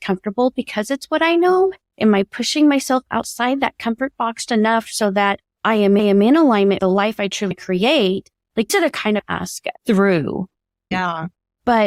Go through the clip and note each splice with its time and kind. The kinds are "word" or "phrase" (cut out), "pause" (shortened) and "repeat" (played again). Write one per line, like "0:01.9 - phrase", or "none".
0:04.5 - word
0:05.5 - pause
0:06.0 - repeat
0:06.8 - word
0:07.5 - word
0:08.7 - word
0:09.2 - phrase
0:09.8 - pause